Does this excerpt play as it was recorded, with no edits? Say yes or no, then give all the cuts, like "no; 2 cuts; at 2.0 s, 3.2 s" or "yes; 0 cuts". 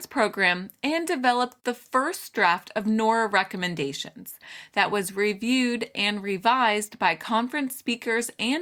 yes; 0 cuts